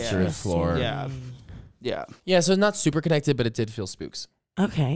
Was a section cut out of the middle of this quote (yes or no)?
yes